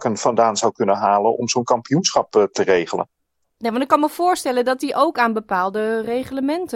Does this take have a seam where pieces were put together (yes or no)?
no